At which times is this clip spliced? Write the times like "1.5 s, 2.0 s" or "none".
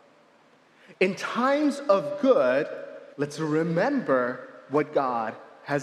3.1 s